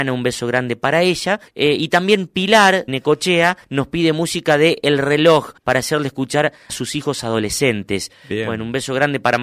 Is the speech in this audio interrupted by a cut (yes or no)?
yes